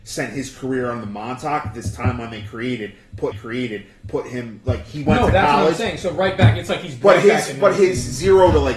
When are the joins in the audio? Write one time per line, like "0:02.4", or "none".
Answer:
0:03.3